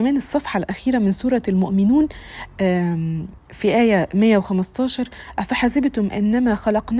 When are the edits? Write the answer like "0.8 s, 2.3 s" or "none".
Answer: 3.4 s